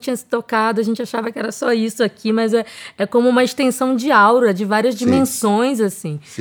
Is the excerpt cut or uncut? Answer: uncut